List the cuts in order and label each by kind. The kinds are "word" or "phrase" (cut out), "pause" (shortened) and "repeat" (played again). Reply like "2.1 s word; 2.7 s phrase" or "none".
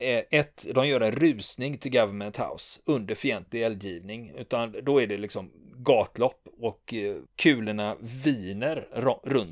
7.3 s pause